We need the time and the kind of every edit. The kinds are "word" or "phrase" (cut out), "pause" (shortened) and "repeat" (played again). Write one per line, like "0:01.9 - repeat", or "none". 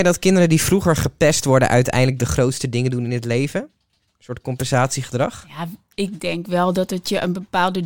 none